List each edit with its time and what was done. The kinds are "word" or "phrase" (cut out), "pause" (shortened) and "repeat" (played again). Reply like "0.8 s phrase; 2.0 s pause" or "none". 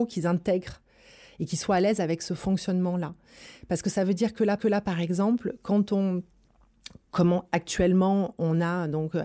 4.6 s repeat